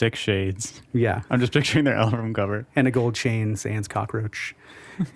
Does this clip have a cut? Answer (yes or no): no